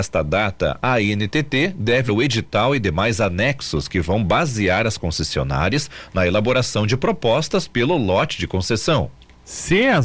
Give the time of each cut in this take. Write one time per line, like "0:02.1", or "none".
0:02.1